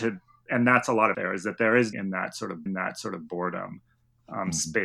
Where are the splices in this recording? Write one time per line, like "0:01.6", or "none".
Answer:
0:01.1
0:01.9
0:02.7

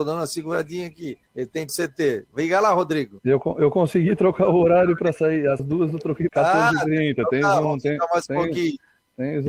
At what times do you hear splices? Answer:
0:01.3
0:01.7
0:05.6
0:06.3

